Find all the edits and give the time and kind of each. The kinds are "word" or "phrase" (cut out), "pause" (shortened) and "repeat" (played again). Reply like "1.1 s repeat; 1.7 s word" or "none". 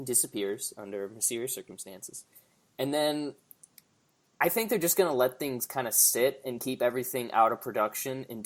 none